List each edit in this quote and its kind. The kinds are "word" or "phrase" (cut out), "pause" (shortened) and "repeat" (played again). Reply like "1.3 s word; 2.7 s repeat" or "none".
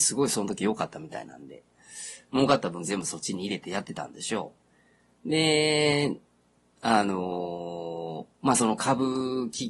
none